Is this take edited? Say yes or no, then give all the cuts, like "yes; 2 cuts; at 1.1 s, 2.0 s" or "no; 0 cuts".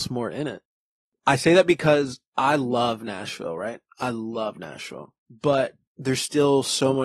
yes; 1 cut; at 5.2 s